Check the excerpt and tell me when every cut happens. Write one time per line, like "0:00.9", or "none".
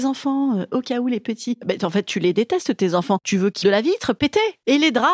0:03.6